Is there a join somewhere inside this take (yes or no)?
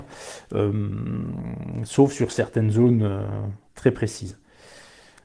yes